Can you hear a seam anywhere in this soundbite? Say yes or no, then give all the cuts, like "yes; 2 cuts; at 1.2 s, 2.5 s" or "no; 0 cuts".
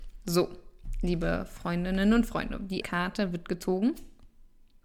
yes; 1 cut; at 2.8 s